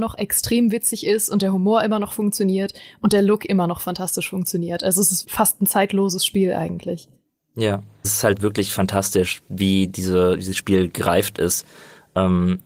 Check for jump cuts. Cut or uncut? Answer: cut